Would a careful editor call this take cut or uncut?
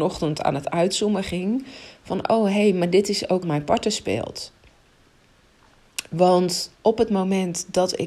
cut